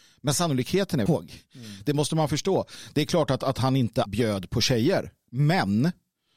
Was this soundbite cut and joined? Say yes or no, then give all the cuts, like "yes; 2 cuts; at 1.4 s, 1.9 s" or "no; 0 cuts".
yes; 2 cuts; at 1.1 s, 4.1 s